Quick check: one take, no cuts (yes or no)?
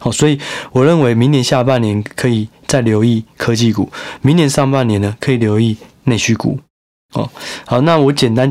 yes